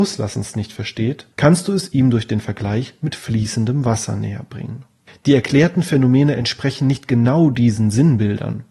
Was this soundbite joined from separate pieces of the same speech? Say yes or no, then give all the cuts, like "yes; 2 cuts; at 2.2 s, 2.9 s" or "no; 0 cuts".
yes; 2 cuts; at 1.3 s, 5.1 s